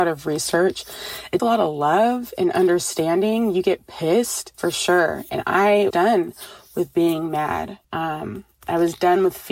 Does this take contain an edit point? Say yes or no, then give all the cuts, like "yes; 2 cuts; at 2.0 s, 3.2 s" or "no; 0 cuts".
yes; 4 cuts; at 1.4 s, 4.5 s, 5.9 s, 7.8 s